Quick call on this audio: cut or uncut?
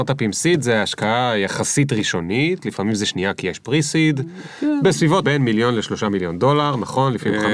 cut